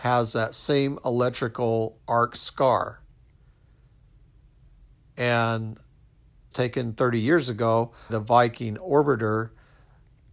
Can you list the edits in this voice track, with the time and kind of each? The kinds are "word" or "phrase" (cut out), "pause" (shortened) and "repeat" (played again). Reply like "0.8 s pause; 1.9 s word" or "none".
6.5 s word; 8.1 s word